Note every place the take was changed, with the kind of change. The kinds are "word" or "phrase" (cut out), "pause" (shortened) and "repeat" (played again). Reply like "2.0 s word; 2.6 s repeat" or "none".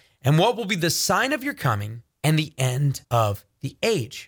2.1 s pause; 3.0 s pause